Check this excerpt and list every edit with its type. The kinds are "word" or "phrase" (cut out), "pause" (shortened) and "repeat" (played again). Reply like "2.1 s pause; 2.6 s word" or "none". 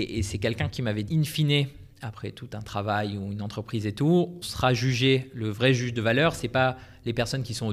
1.1 s phrase; 4.4 s word